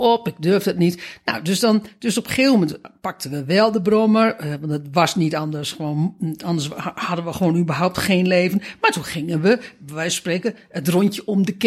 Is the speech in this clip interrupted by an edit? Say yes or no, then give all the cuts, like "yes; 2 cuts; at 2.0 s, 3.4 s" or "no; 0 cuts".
no; 0 cuts